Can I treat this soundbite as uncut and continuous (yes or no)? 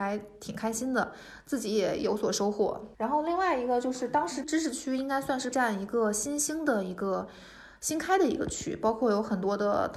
no